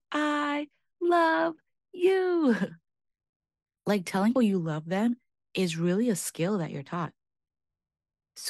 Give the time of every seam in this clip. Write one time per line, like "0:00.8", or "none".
0:04.4